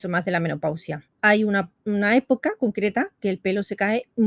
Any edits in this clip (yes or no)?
yes